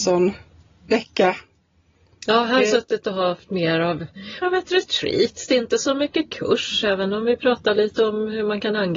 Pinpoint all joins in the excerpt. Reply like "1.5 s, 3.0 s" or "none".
2.6 s, 4.4 s